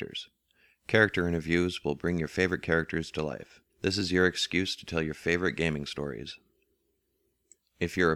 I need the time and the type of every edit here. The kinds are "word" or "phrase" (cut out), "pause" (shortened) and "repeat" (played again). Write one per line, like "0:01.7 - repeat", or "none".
0:03.7 - pause